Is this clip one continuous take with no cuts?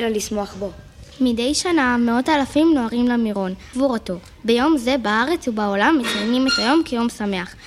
no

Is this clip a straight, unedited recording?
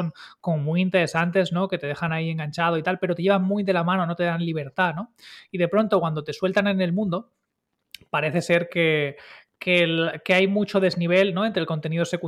yes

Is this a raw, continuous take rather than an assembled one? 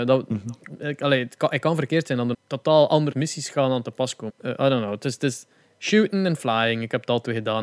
no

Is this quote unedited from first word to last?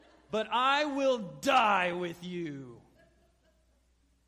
yes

